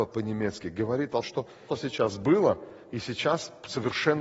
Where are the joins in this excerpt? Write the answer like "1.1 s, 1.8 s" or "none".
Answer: 1.2 s, 1.7 s

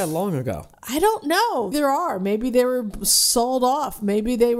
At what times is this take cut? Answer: 1.7 s

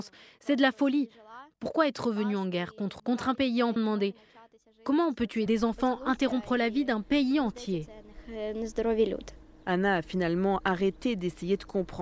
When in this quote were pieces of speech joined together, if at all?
3.0 s, 3.8 s, 5.5 s

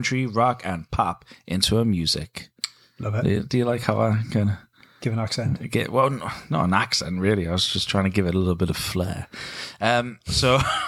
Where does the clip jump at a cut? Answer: none

